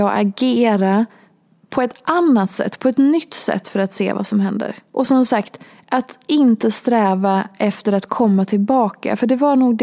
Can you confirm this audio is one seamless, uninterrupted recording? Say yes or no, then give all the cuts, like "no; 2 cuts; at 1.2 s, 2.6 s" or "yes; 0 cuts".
yes; 0 cuts